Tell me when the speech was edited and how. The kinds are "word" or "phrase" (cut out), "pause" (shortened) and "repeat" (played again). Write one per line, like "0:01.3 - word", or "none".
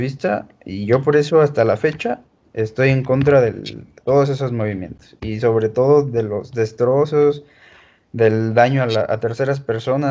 none